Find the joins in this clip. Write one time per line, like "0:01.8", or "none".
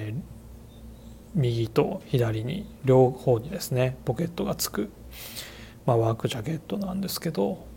0:01.2